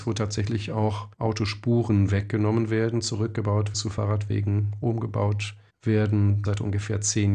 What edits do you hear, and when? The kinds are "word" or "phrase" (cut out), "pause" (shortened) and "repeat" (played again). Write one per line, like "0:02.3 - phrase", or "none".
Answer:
0:01.1 - pause
0:03.7 - word
0:06.4 - word